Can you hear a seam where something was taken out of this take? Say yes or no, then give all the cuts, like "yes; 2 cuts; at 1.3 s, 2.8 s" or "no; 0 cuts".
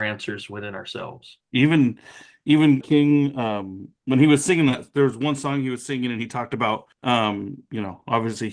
yes; 4 cuts; at 1.5 s, 2.8 s, 4.0 s, 6.9 s